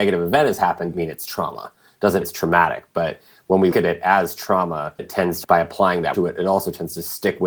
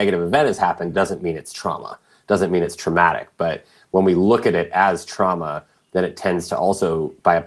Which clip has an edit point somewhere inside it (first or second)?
first